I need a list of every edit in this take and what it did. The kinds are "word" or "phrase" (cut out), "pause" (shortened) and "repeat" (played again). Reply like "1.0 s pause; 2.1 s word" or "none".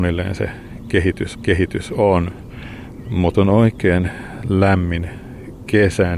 1.3 s repeat; 3.3 s word